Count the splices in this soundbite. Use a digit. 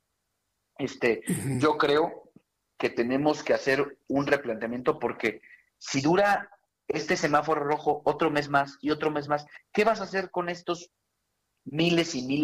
0